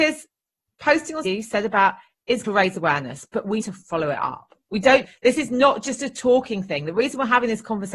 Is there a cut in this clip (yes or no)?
yes